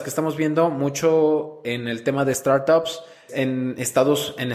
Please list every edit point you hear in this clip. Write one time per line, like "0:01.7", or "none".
0:03.3